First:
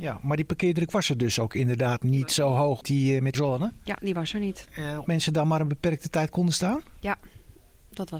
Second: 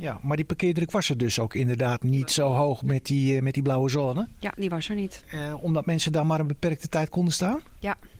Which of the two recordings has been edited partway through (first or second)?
first